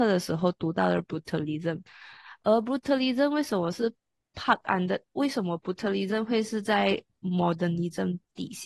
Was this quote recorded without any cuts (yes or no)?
yes